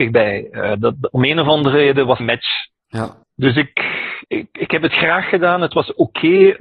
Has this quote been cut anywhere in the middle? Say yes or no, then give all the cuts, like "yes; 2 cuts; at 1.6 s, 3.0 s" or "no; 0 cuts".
yes; 3 cuts; at 2.2 s, 3.2 s, 4.2 s